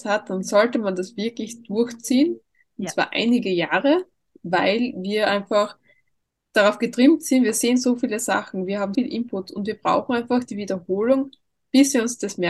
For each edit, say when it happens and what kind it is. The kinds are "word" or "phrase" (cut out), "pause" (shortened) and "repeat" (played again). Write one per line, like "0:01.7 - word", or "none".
0:08.9 - word